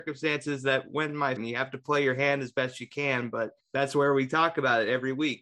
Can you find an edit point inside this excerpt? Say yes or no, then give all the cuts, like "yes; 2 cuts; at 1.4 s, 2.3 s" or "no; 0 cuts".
yes; 2 cuts; at 1.4 s, 3.6 s